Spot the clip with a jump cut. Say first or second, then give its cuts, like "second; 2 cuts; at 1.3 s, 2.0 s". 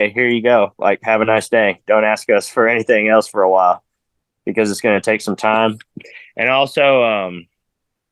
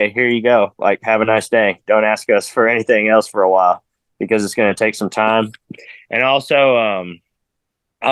second; 1 cut; at 4.1 s